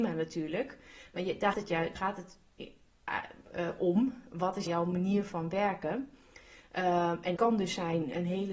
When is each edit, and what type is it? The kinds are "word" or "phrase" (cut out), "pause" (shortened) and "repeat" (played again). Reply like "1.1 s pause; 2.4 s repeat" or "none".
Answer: 1.5 s word; 2.0 s word; 4.7 s phrase; 7.4 s word